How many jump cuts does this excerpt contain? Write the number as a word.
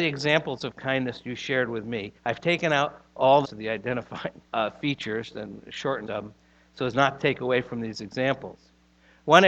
four